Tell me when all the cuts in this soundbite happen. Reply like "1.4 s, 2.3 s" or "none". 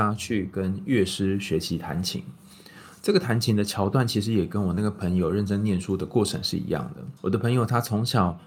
7.2 s